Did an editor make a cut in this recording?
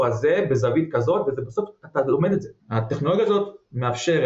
yes; 1 cut; at 2.6 s

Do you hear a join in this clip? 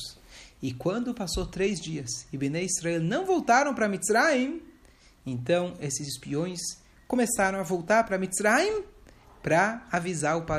no; 0 cuts

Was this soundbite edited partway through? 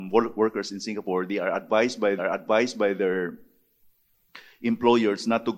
yes; 1 cut; at 2.2 s

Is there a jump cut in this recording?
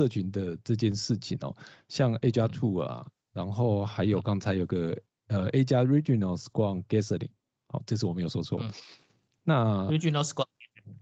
no; 0 cuts

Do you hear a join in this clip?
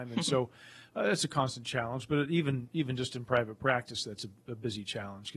no; 0 cuts

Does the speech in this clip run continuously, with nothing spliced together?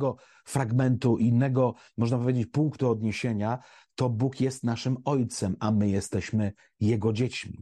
yes; 0 cuts

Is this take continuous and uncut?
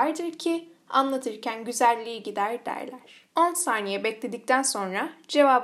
no; 1 cut; at 3.3 s

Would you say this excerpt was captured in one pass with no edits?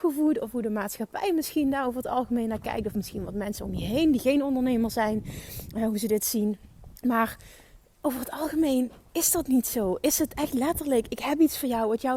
no; 1 cut; at 7.0 s

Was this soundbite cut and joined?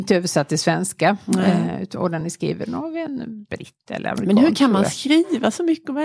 no; 0 cuts

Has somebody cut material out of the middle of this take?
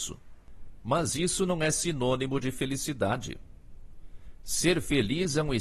no; 0 cuts

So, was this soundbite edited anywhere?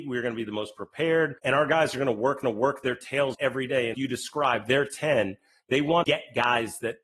yes; 5 cuts; at 1.4 s, 2.4 s, 3.3 s, 3.9 s, 6.0 s

